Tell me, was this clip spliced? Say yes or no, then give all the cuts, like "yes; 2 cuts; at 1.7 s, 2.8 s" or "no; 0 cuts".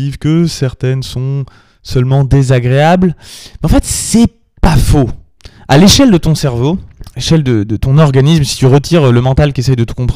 no; 0 cuts